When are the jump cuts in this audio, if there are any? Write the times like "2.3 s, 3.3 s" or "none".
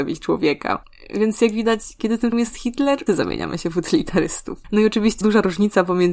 2.3 s, 3.1 s, 5.2 s